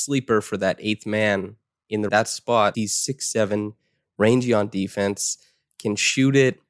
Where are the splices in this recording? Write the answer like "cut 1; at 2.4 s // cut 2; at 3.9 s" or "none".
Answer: cut 1; at 2.1 s // cut 2; at 2.7 s